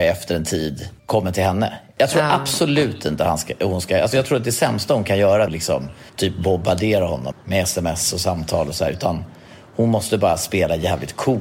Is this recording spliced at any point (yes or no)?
yes